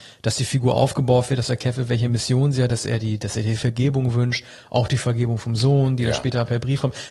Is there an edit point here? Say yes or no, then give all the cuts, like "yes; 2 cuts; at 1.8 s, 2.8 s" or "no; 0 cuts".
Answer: no; 0 cuts